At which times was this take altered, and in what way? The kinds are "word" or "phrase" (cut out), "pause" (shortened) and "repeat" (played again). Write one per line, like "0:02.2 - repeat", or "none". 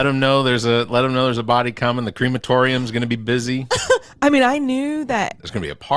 none